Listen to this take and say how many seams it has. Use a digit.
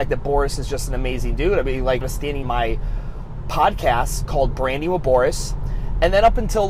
2